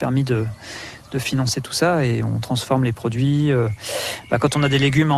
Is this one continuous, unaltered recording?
yes; 0 cuts

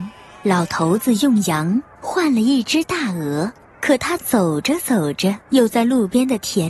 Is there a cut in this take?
yes; 2 cuts; at 3.7 s, 5.4 s

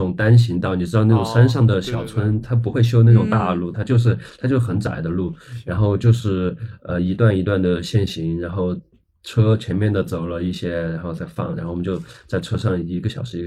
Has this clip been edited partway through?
no; 0 cuts

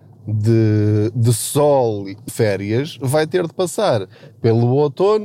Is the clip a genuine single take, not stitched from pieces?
no; 1 cut; at 2.3 s

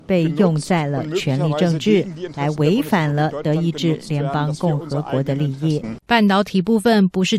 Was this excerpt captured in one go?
no; 1 cut; at 6.0 s

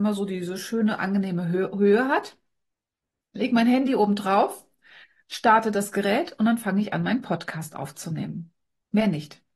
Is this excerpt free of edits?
yes; 0 cuts

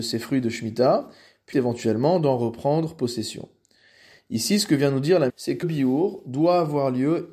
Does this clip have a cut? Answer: yes; 3 cuts; at 1.5 s, 5.3 s, 5.6 s

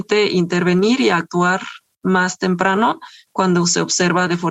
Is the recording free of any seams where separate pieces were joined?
yes; 0 cuts

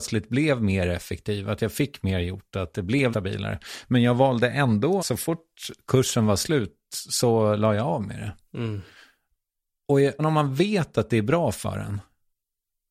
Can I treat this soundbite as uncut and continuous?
no; 3 cuts; at 3.1 s, 5.0 s, 10.2 s

